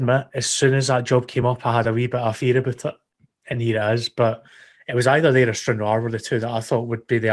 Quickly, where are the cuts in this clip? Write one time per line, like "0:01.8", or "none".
none